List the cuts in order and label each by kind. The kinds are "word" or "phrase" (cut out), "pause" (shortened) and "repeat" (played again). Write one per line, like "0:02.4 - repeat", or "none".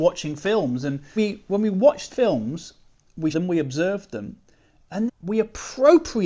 0:01.2 - word
0:02.1 - word
0:03.3 - word
0:05.1 - word